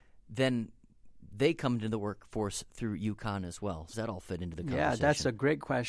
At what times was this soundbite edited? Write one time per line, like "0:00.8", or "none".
0:03.9